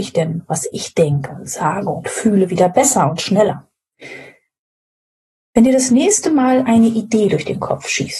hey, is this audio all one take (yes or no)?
yes